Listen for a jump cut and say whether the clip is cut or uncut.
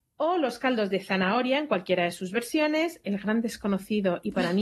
cut